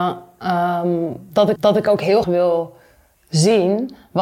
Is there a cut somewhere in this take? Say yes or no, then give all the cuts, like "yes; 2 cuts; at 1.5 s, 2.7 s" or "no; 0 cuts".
yes; 2 cuts; at 1.6 s, 2.2 s